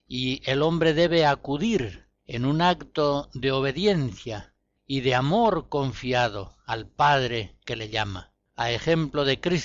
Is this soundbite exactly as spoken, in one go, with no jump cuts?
yes; 0 cuts

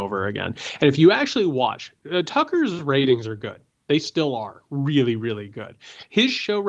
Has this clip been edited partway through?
no; 0 cuts

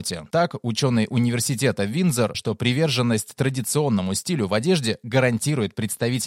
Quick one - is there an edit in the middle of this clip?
yes; 1 cut; at 2.3 s

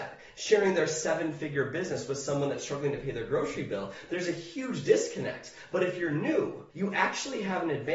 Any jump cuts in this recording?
yes; 1 cut; at 6.7 s

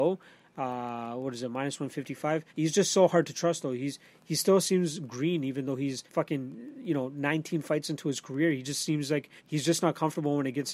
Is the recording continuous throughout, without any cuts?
no; 3 cuts; at 2.5 s, 6.1 s, 9.4 s

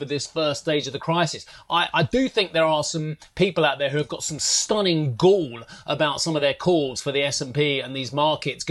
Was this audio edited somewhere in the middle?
no; 0 cuts

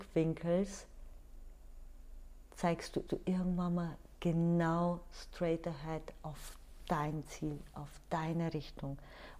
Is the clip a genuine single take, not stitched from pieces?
no; 2 cuts; at 3.1 s, 8.0 s

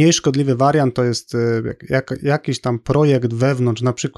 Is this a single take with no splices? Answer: yes; 0 cuts

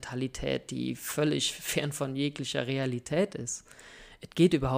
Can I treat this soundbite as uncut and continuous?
yes; 0 cuts

